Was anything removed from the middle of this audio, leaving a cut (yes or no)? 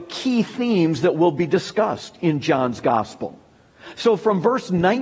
no